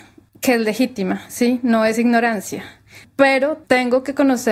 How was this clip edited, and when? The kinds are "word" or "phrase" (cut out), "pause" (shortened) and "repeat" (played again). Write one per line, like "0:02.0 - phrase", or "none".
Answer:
none